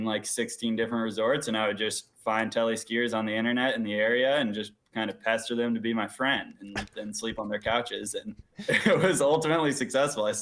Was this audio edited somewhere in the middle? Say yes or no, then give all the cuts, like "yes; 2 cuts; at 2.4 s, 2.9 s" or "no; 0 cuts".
yes; 2 cuts; at 4.8 s, 8.5 s